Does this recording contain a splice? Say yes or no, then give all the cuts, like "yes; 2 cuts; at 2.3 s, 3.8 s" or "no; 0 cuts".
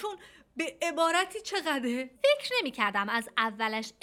yes; 1 cut; at 2.2 s